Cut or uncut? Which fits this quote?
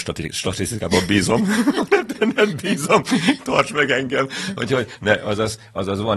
cut